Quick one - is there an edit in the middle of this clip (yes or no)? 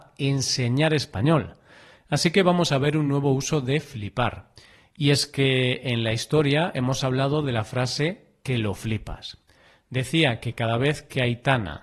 no